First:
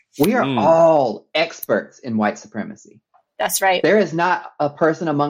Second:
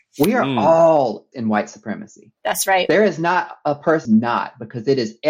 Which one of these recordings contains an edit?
second; 3 cuts; at 1.3 s, 2.4 s, 4.0 s

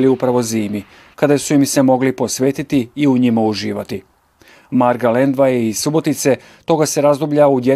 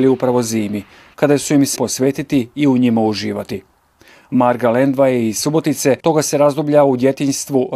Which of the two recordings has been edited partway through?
second; 2 cuts; at 1.8 s, 6.0 s

